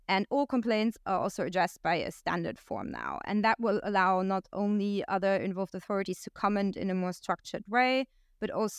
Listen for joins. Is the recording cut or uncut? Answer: uncut